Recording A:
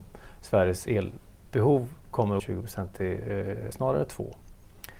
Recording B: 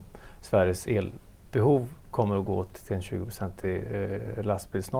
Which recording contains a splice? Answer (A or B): A